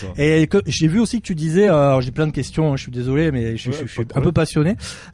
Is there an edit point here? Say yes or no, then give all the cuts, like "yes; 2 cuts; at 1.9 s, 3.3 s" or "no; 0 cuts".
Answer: no; 0 cuts